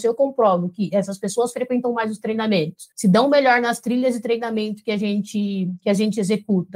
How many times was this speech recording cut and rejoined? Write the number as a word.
one